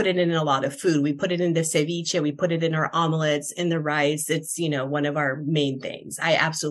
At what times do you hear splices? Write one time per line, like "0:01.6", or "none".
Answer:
none